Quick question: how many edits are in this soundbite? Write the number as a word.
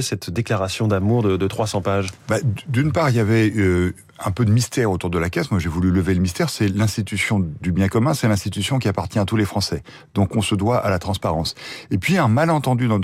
zero